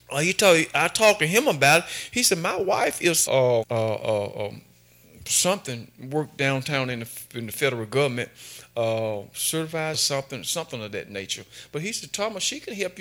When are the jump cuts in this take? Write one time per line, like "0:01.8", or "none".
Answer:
0:03.3
0:03.6
0:09.9